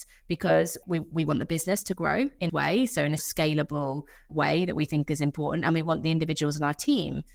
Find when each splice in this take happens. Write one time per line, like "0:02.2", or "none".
0:02.5
0:03.2